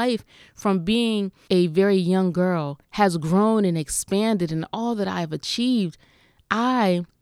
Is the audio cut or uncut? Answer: cut